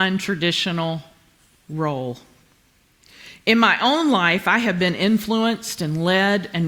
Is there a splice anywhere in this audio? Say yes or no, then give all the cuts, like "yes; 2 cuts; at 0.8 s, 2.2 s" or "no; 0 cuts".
no; 0 cuts